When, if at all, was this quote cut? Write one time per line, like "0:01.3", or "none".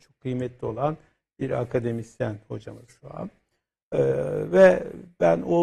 0:02.9